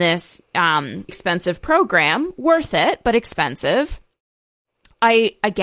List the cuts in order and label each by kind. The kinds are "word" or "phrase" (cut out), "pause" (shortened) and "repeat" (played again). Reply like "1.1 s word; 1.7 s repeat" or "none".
1.1 s word